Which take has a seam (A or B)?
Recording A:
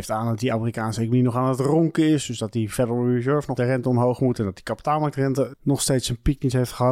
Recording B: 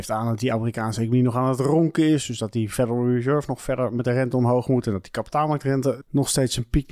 A